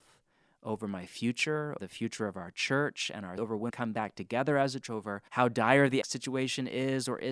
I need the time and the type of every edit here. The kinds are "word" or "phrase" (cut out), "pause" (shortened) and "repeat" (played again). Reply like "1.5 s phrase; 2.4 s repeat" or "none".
1.8 s word; 3.4 s word; 3.7 s word; 4.8 s word; 5.3 s pause; 6.0 s word